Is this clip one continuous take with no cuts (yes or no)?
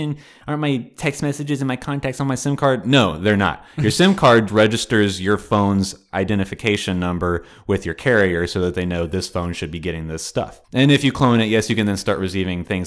no